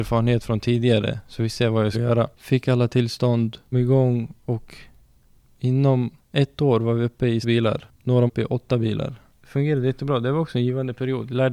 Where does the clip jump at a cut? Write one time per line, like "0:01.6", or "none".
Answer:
0:01.9
0:02.3
0:03.7
0:07.4
0:08.3